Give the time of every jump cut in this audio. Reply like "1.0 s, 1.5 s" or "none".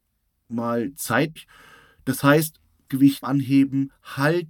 1.4 s, 2.9 s, 3.2 s